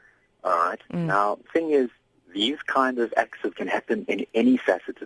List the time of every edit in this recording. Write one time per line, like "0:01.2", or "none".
0:01.5
0:03.5